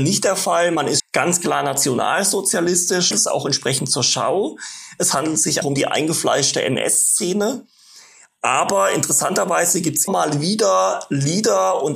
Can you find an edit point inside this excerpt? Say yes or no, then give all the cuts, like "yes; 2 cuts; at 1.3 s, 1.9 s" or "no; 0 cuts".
yes; 4 cuts; at 1.0 s, 3.1 s, 5.6 s, 10.1 s